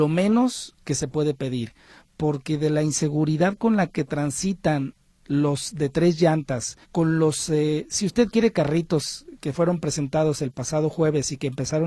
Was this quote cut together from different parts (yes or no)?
yes